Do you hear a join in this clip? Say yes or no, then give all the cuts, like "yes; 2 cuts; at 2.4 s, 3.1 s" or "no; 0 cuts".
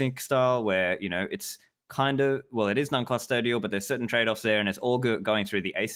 no; 0 cuts